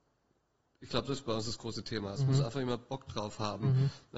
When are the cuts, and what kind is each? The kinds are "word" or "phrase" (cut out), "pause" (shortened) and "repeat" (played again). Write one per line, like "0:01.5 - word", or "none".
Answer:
none

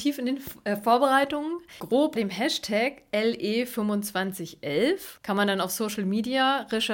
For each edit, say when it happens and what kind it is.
0:02.2 - word
0:05.2 - pause

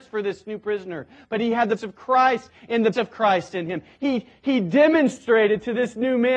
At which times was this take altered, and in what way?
0:01.8 - word
0:02.9 - word

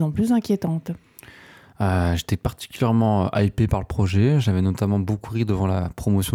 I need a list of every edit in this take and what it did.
none

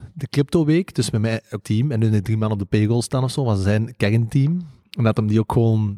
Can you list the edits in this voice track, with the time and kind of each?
0:01.6 - word

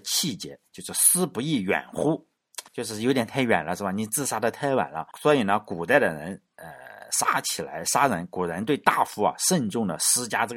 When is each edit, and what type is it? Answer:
0:02.7 - pause
0:05.1 - pause

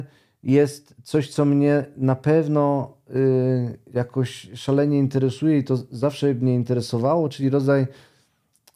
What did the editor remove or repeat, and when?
none

